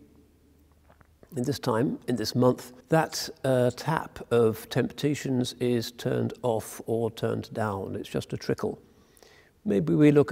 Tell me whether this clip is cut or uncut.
cut